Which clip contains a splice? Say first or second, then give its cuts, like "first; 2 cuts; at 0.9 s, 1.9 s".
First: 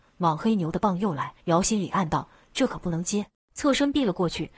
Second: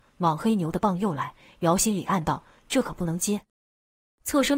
first; 2 cuts; at 1.4 s, 3.4 s